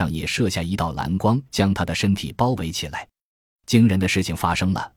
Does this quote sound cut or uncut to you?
cut